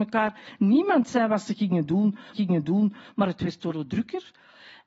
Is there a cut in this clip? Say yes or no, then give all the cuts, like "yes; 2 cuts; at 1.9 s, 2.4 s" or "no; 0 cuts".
yes; 2 cuts; at 2.3 s, 3.7 s